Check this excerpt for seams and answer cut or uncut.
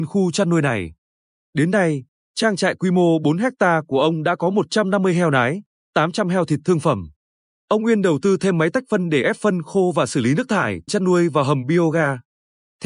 cut